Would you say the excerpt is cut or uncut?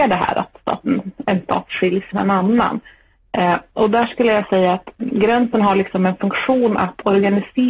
cut